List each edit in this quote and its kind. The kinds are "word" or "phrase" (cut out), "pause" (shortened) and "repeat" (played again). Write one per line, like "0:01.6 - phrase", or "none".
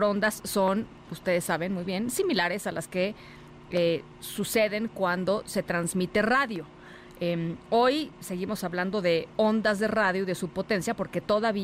none